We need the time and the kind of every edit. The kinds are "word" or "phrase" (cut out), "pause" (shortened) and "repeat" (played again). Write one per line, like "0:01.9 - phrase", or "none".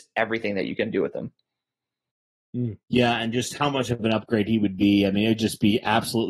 0:02.8 - pause